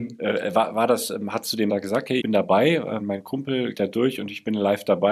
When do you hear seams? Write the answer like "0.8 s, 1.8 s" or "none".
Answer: 1.7 s, 2.2 s, 3.0 s, 3.7 s